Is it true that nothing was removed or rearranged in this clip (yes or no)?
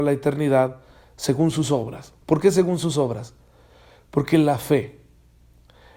no